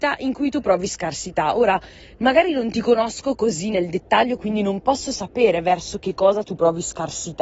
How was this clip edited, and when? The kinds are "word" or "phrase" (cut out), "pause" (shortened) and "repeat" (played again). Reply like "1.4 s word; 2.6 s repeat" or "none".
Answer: none